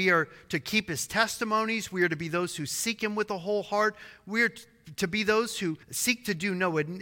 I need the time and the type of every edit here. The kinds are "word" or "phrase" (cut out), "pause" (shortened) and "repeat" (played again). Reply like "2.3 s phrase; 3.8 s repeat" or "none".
5.8 s pause